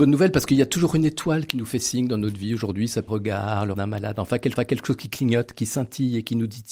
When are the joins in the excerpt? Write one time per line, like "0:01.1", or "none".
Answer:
0:03.1
0:03.7
0:04.6

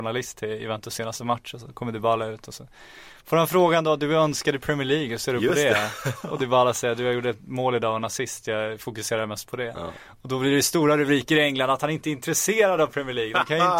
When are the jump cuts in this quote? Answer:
none

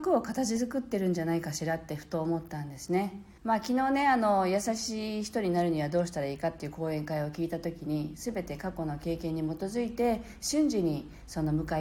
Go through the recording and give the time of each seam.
0:03.4

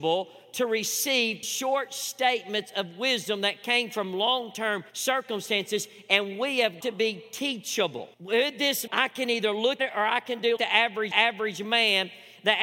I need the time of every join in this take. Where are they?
0:01.4
0:04.9
0:06.8
0:08.1
0:08.9
0:09.8
0:10.6
0:11.1

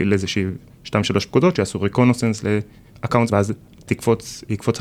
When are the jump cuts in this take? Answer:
0:03.3

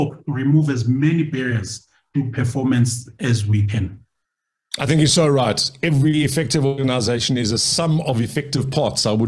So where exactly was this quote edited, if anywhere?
none

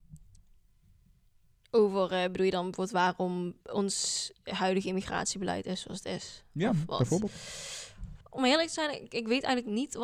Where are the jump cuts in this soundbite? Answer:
0:03.6
0:08.2

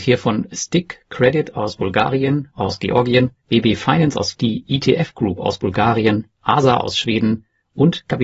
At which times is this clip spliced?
0:02.5
0:03.4
0:04.3

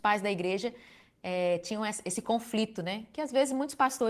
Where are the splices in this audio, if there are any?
none

